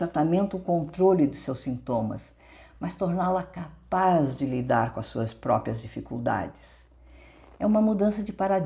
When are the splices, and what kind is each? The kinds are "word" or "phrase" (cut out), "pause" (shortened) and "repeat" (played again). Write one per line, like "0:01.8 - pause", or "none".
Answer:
none